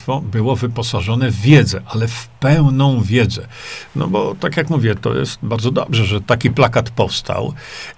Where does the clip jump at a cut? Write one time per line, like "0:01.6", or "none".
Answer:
none